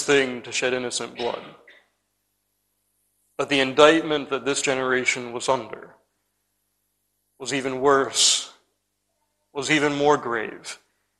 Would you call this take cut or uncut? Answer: uncut